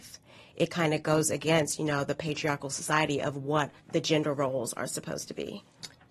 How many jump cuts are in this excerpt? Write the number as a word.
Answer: one